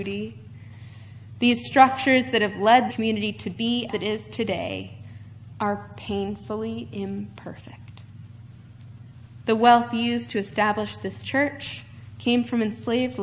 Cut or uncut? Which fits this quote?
cut